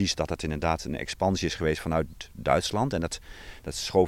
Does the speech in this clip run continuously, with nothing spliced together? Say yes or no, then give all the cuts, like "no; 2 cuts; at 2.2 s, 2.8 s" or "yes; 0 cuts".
yes; 0 cuts